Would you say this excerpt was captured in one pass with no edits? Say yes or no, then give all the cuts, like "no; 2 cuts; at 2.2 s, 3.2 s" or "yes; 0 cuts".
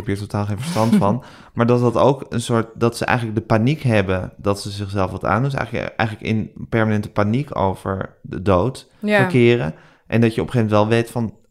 yes; 0 cuts